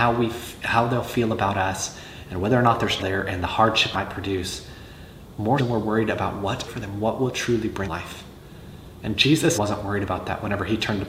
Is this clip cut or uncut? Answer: cut